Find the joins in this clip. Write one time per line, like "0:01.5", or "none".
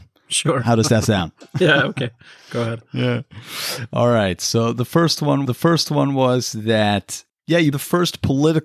0:05.4
0:07.3
0:07.7